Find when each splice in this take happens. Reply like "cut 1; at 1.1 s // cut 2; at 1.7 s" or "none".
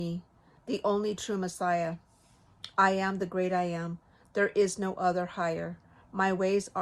none